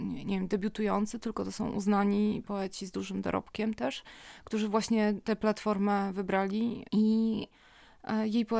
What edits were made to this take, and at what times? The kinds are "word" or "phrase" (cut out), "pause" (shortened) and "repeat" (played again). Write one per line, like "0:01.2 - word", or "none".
0:06.9 - pause